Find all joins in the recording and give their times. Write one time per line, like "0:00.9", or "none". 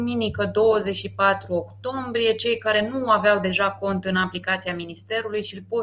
none